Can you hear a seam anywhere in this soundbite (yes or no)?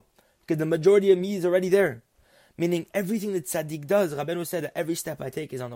no